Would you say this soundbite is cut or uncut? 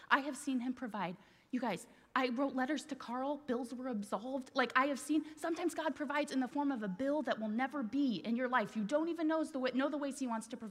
uncut